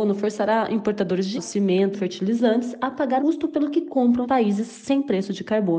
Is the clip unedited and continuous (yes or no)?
no